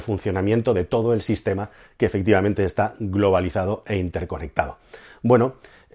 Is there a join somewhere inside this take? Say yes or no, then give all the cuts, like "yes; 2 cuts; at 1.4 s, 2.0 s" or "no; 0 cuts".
no; 0 cuts